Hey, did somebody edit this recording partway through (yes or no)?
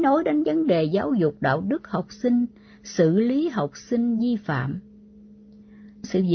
no